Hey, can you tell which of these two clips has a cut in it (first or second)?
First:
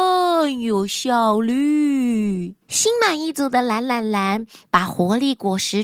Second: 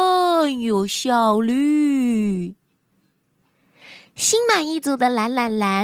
first